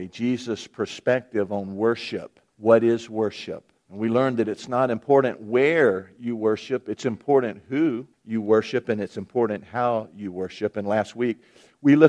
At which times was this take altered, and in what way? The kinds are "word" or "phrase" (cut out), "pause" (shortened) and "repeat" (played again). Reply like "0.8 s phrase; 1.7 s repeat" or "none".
2.5 s pause; 3.8 s pause; 8.1 s pause